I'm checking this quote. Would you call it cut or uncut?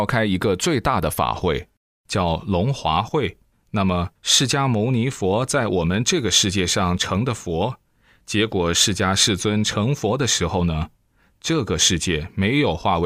cut